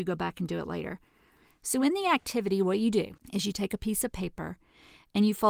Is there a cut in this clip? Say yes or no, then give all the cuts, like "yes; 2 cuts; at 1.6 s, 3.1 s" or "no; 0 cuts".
no; 0 cuts